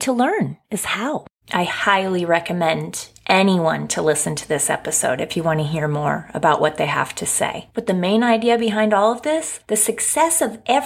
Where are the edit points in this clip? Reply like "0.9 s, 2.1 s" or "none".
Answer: none